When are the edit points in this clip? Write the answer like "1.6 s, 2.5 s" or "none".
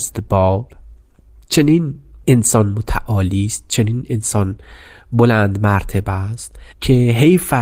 6.7 s